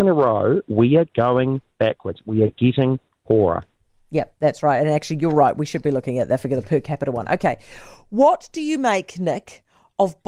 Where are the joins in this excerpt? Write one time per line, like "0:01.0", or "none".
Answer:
none

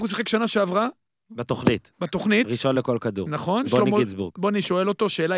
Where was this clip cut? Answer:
none

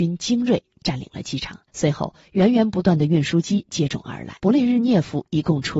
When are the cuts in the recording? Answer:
0:01.7
0:04.4

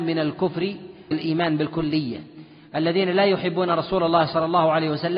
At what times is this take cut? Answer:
0:01.1

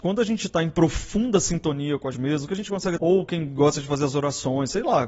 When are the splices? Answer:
0:02.1
0:03.0

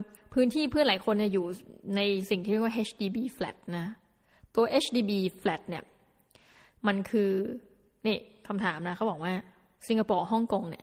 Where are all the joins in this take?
none

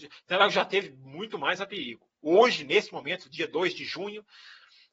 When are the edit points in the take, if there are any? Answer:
none

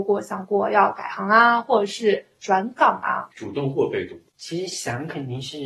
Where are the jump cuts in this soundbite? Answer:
0:03.3
0:04.3

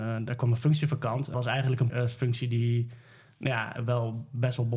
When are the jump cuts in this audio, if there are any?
0:01.3
0:01.9

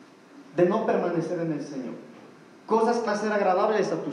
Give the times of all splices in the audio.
0:03.1

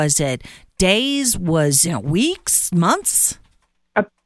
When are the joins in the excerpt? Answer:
0:01.8

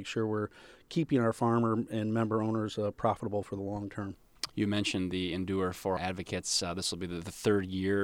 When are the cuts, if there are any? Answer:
0:06.0

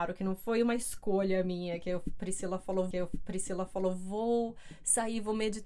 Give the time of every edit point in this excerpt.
0:02.9

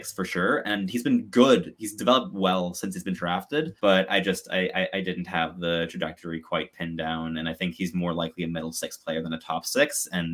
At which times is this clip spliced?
0:03.8

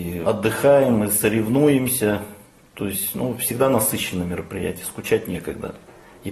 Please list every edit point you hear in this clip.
none

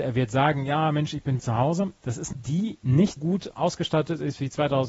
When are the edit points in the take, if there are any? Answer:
0:01.4
0:02.0
0:02.3
0:03.2

